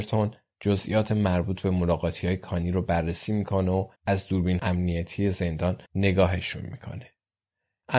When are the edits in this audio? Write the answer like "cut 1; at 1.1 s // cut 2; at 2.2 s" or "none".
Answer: cut 1; at 4.0 s // cut 2; at 4.6 s // cut 3; at 5.9 s